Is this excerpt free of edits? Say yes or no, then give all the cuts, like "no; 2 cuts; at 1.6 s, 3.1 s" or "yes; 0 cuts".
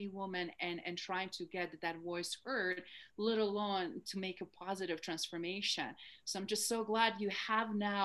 yes; 0 cuts